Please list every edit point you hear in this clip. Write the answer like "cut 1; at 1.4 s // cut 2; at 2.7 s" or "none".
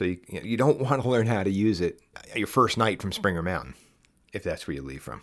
none

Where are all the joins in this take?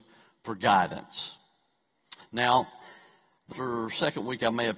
cut 1; at 3.5 s

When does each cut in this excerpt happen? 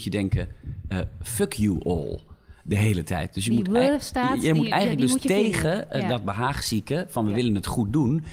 none

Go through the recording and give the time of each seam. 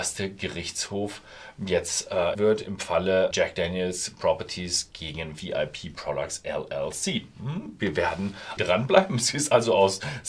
cut 1; at 2.3 s // cut 2; at 3.3 s // cut 3; at 8.6 s

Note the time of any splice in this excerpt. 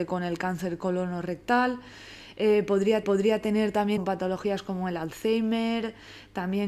cut 1; at 3.0 s // cut 2; at 4.0 s

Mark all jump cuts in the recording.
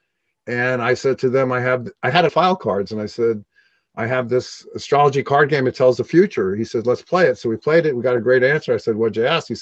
cut 1; at 2.3 s

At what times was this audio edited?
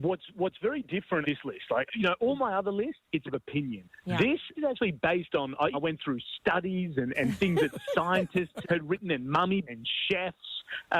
cut 1; at 1.2 s // cut 2; at 1.9 s // cut 3; at 3.3 s // cut 4; at 4.6 s // cut 5; at 5.7 s // cut 6; at 7.1 s // cut 7; at 8.6 s // cut 8; at 9.7 s

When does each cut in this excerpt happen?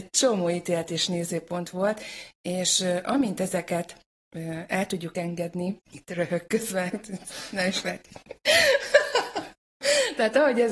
cut 1; at 5.8 s

